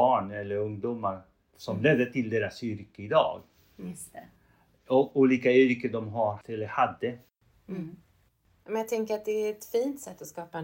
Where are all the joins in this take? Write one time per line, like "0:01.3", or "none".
0:06.4